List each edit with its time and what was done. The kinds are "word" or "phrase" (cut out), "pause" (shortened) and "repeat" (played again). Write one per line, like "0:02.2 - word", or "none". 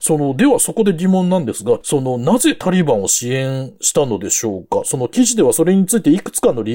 0:01.8 - phrase